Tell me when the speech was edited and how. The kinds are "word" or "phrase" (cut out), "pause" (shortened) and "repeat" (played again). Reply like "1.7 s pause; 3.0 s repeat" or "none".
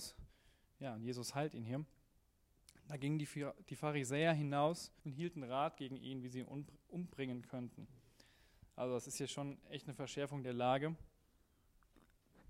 5.0 s pause